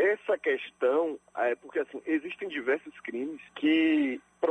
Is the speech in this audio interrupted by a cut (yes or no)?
yes